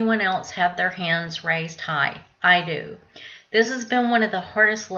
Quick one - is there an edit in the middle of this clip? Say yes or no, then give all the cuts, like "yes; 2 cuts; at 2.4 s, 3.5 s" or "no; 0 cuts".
no; 0 cuts